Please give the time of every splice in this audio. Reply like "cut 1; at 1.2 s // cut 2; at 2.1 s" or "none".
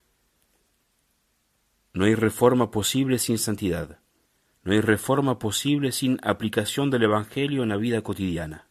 cut 1; at 4.3 s